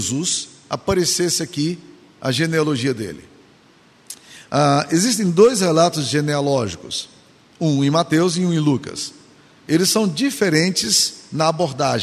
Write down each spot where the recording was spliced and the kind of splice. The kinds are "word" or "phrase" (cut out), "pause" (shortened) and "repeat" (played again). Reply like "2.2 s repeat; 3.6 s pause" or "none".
none